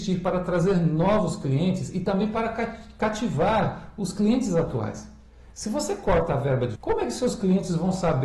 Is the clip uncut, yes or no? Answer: no